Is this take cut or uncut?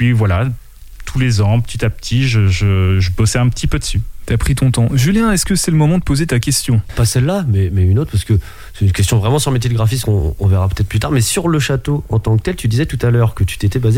cut